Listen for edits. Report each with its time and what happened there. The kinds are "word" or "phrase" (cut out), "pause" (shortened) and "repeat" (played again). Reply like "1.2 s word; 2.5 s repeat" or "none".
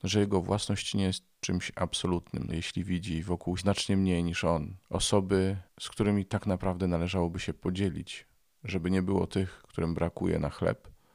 2.5 s word; 3.6 s phrase; 4.8 s pause